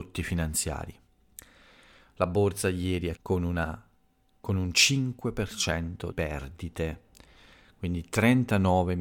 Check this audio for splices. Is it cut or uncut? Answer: cut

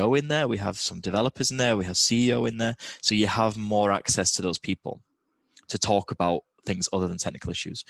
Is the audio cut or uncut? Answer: uncut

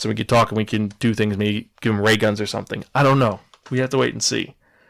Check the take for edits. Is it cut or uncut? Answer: uncut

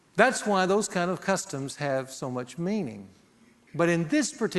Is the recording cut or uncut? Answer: uncut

